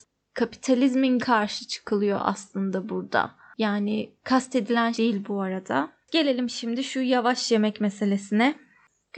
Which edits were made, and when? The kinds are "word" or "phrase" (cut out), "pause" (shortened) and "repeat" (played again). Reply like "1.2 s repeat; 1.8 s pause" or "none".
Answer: 1.2 s phrase; 4.9 s phrase; 6.0 s pause